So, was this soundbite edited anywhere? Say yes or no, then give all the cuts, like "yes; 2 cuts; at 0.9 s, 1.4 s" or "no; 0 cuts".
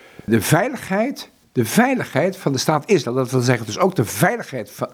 no; 0 cuts